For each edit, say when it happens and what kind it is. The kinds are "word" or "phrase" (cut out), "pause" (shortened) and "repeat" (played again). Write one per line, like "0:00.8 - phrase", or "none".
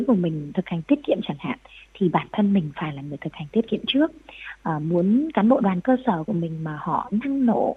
none